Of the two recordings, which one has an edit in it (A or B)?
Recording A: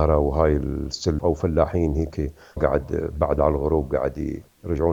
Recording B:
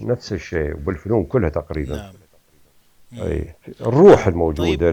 A